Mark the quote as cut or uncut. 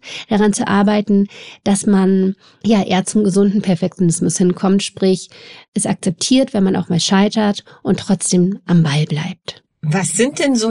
uncut